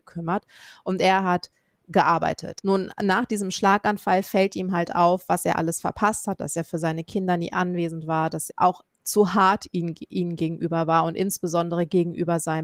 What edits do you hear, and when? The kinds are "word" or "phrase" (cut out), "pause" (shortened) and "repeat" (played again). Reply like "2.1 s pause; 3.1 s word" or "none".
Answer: 8.5 s phrase